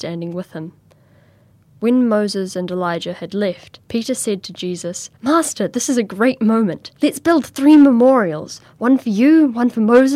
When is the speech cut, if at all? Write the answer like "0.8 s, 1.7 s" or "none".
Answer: 3.8 s, 5.2 s, 7.0 s